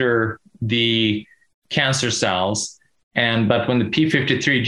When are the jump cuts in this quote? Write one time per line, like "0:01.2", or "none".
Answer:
none